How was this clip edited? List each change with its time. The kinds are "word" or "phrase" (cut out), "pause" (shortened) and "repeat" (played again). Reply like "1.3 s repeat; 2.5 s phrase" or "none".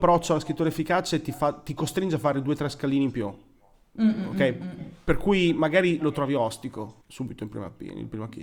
7.0 s pause